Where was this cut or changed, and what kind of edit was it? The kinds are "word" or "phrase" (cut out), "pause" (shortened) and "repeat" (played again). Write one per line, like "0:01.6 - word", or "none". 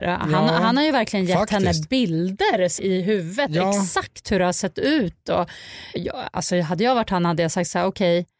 0:02.8 - word
0:05.9 - word